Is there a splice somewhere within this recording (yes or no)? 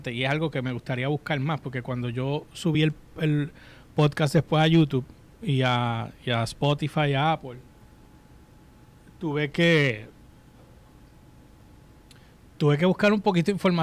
no